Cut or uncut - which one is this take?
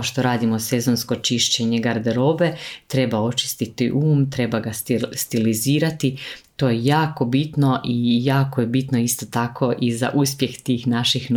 uncut